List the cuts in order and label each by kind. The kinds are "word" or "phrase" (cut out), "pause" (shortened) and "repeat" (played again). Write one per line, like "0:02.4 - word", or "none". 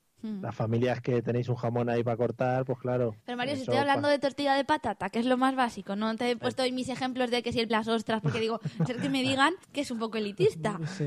0:07.7 - word
0:08.9 - word
0:09.6 - pause